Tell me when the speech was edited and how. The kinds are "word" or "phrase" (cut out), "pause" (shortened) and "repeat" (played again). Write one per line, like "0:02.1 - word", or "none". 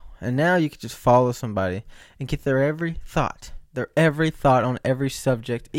none